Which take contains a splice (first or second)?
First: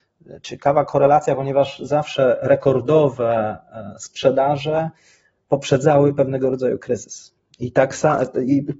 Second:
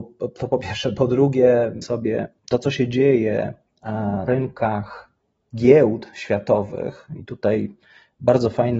second